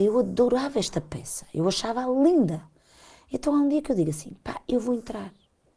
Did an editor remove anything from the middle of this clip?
no; 0 cuts

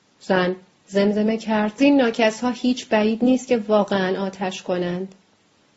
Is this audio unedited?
no; 1 cut; at 1.8 s

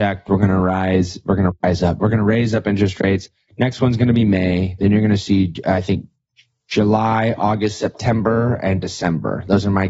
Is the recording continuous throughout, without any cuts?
yes; 0 cuts

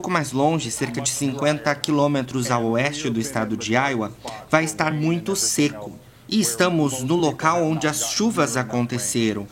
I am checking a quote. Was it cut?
no; 0 cuts

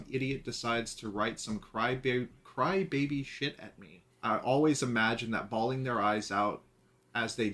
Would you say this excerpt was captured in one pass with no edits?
no; 1 cut; at 4.1 s

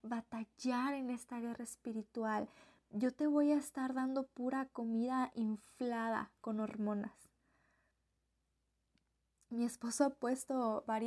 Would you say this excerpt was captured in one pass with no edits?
yes; 0 cuts

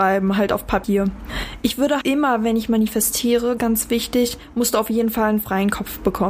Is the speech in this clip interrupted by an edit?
yes; 2 cuts; at 2.0 s, 3.6 s

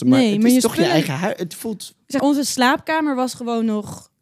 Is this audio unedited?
no; 1 cut; at 2.2 s

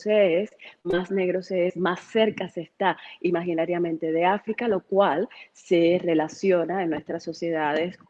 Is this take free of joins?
yes; 0 cuts

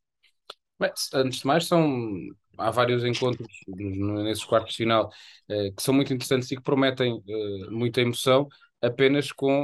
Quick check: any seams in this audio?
no; 0 cuts

